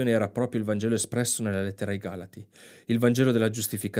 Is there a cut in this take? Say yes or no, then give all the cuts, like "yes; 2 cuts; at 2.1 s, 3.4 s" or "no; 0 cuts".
no; 0 cuts